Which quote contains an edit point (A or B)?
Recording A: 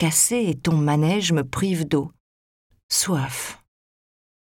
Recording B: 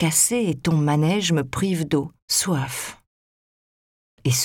B